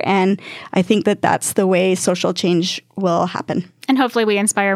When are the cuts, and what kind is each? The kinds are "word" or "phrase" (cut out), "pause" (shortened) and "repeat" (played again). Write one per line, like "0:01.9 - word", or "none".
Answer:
none